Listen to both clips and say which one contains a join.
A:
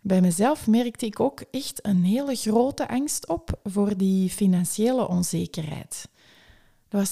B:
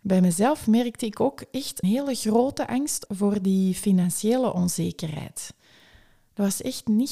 B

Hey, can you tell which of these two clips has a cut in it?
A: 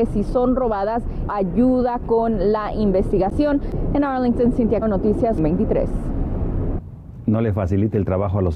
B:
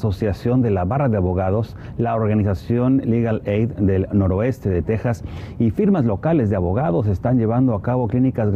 A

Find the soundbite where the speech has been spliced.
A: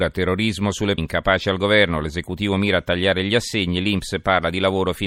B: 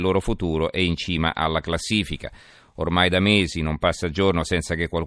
A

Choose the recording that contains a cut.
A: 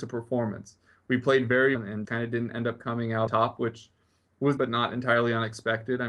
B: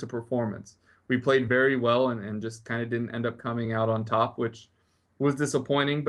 A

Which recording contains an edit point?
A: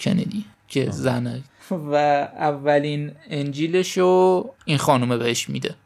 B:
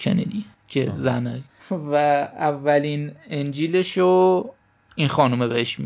A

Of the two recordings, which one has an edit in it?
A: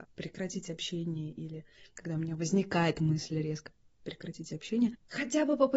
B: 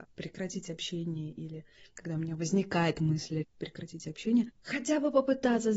B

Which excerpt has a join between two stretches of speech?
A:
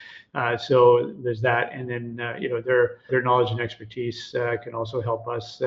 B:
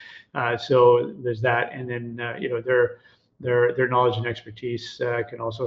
A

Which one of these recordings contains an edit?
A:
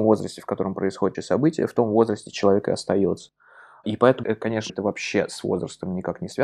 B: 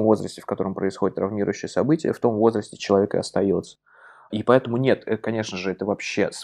A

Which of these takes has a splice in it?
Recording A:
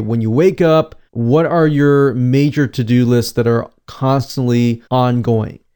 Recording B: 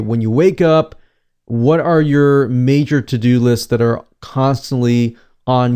A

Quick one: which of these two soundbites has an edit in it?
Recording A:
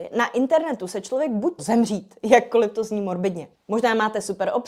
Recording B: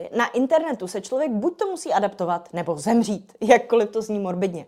A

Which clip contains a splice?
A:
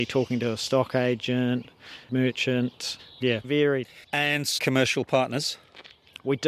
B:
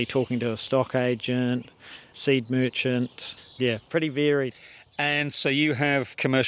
A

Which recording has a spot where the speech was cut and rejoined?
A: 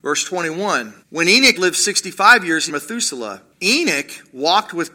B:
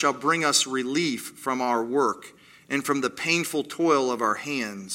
A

